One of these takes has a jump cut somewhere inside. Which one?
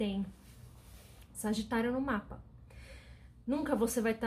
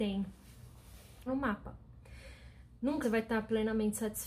second; 2 cuts; at 1.3 s, 3.0 s

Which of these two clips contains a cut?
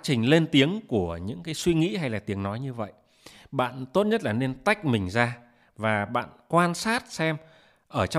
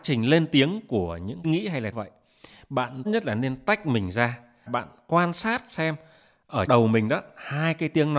second; 5 cuts; at 1.4 s, 1.9 s, 3.1 s, 4.7 s, 6.7 s

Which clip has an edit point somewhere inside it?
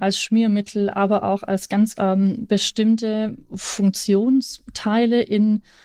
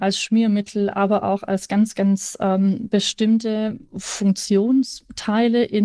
first; 1 cut; at 1.9 s

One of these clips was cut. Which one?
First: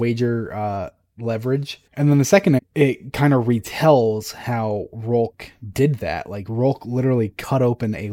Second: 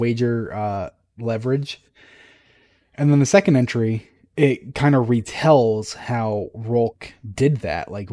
first; 2 cuts; at 1.9 s, 2.6 s

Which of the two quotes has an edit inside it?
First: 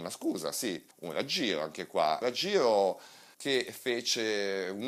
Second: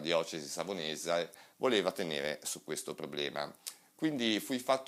first; 3 cuts; at 0.9 s, 2.2 s, 3.3 s

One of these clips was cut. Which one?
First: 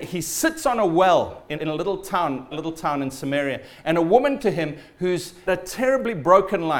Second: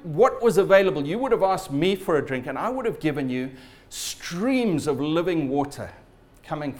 first; 4 cuts; at 1.5 s, 2.5 s, 4.4 s, 5.5 s

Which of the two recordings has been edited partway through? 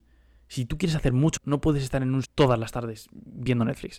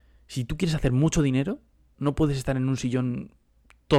first; 2 cuts; at 1.4 s, 2.2 s

